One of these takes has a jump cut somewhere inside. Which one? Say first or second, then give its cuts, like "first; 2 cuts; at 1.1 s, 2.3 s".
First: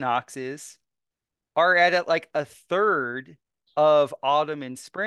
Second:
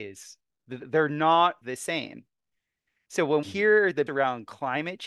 second; 3 cuts; at 1.6 s, 3.4 s, 4.1 s